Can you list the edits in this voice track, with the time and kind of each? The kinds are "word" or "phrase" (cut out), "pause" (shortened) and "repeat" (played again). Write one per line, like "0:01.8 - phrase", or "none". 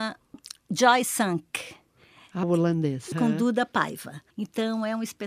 0:02.4 - word
0:03.1 - word
0:04.3 - pause

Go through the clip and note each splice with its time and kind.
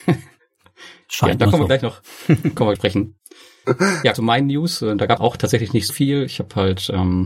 0:02.8 - phrase
0:04.1 - phrase
0:05.2 - phrase
0:05.9 - word

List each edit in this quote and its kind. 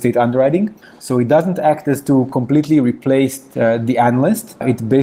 none

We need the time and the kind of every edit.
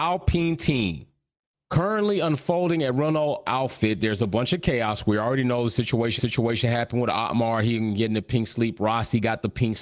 0:01.3 - pause
0:03.5 - word
0:06.2 - repeat

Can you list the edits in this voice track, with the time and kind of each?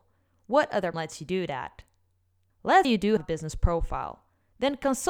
0:00.9 - word
0:02.8 - word
0:03.2 - word

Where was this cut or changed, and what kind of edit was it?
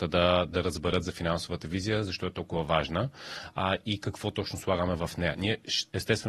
none

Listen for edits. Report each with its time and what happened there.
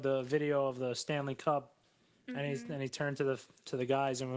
none

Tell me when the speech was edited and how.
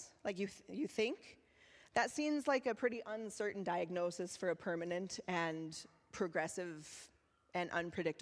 none

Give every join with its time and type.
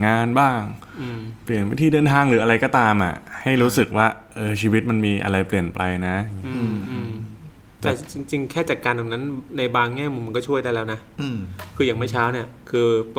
none

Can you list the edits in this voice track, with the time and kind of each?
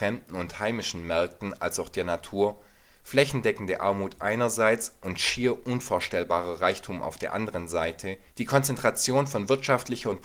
0:08.3 - pause

